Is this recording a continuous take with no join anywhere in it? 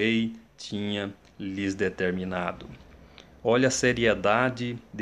yes; 0 cuts

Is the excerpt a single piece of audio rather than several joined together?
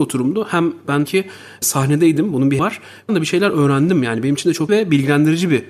no; 5 cuts; at 1.1 s, 1.6 s, 2.6 s, 3.1 s, 4.7 s

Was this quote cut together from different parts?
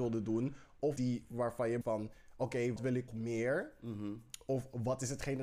yes; 4 cuts; at 1.0 s, 1.8 s, 2.8 s, 3.1 s

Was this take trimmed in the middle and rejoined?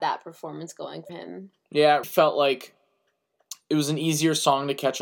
yes; 2 cuts; at 1.1 s, 2.0 s

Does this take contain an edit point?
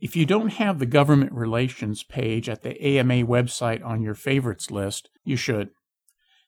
yes; 1 cut; at 5.2 s

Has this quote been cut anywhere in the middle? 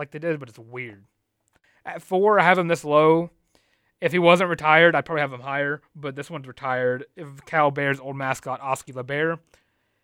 no; 0 cuts

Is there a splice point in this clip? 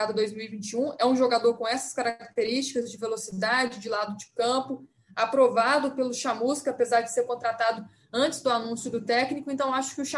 no; 0 cuts

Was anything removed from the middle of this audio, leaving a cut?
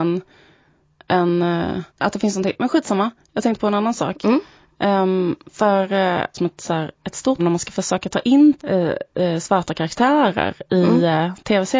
yes; 5 cuts; at 1.9 s, 5.4 s, 6.3 s, 7.4 s, 8.6 s

